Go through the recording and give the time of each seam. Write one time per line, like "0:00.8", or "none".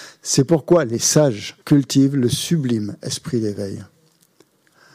0:01.6